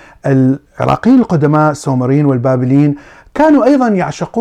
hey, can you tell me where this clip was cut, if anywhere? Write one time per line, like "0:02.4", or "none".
none